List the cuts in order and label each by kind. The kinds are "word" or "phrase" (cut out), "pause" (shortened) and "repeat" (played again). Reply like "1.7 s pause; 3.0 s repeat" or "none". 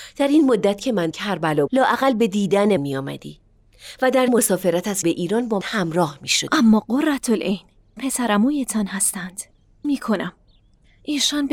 1.1 s word; 1.7 s word; 2.8 s word; 4.3 s word; 5.0 s word; 5.6 s word; 8.0 s word; 9.8 s word